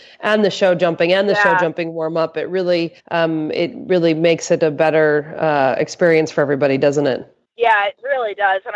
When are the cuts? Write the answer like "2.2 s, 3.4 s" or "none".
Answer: 3.0 s, 7.5 s